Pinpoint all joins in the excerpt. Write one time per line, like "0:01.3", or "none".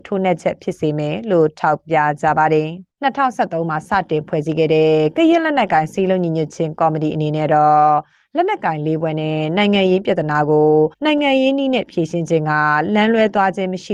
0:02.9
0:10.9